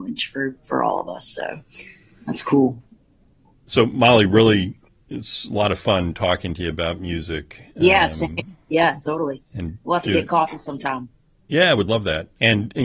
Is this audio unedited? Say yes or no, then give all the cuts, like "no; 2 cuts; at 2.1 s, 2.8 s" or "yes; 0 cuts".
yes; 0 cuts